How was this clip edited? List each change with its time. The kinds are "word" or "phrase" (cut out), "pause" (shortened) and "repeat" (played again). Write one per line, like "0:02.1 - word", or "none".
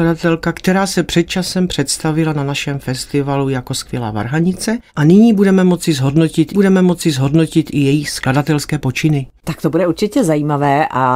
0:04.9 - pause
0:06.5 - repeat
0:09.4 - pause